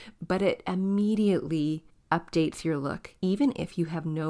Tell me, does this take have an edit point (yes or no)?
yes